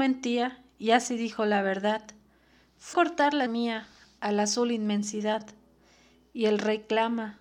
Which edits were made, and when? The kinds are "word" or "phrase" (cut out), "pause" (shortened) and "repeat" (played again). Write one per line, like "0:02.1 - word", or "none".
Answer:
0:02.9 - word
0:03.5 - word